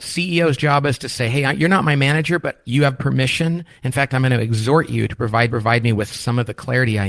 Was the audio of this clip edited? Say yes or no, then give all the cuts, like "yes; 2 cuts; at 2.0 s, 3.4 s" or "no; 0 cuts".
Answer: yes; 1 cut; at 5.5 s